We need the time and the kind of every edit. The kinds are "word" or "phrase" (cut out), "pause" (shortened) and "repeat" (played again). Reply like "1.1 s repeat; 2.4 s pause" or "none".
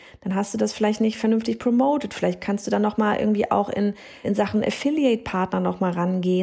4.2 s word